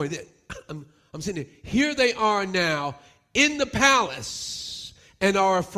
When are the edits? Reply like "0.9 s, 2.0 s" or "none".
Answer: none